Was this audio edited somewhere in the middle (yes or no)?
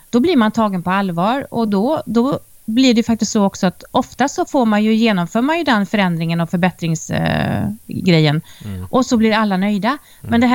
no